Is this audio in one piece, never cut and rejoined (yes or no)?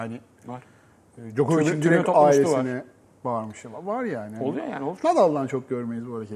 yes